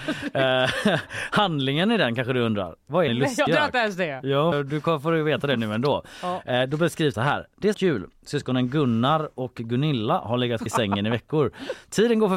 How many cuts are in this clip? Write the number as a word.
six